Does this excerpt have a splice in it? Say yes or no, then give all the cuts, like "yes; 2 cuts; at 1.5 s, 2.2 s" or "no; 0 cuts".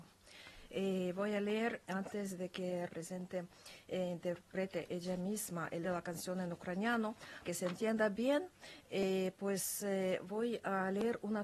yes; 4 cuts; at 1.8 s, 2.9 s, 5.8 s, 7.4 s